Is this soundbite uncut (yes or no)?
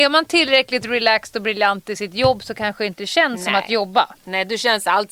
yes